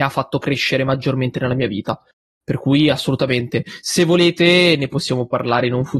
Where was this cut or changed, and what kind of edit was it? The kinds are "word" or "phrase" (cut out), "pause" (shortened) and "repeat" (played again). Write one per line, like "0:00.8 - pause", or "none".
none